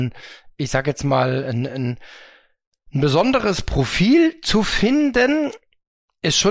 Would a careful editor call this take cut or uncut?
uncut